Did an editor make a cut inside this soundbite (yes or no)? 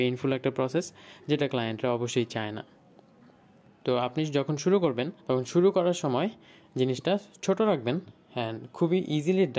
yes